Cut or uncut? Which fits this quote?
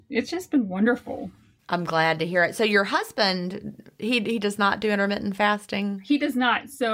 uncut